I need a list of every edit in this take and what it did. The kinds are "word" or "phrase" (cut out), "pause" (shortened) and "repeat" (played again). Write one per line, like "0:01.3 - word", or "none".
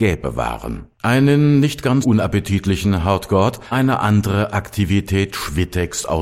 0:00.9 - pause
0:02.0 - word
0:03.7 - word